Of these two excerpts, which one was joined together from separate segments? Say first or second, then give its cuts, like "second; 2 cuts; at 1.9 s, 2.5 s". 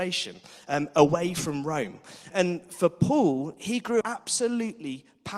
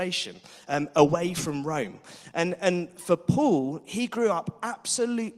first; 2 cuts; at 2.3 s, 4.0 s